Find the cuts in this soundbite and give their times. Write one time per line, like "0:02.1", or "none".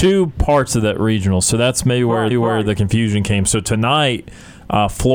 0:02.3